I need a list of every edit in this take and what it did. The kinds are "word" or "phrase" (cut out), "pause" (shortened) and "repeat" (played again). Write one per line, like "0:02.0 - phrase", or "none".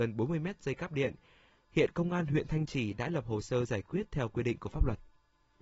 none